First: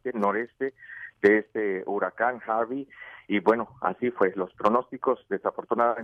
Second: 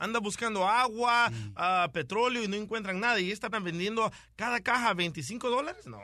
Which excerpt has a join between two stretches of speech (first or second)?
second